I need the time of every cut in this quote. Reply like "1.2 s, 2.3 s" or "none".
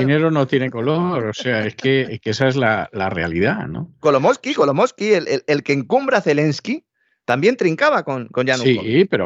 none

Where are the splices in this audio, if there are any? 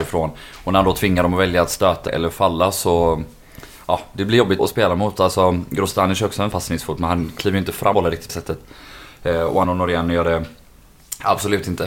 2.1 s, 4.6 s, 6.5 s, 7.9 s, 8.3 s, 9.6 s

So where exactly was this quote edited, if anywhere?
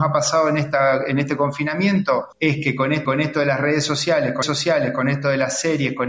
2.3 s, 3.0 s, 4.4 s

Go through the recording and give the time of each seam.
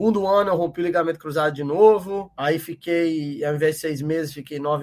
none

